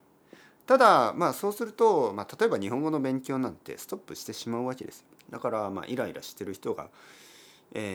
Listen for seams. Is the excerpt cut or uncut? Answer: cut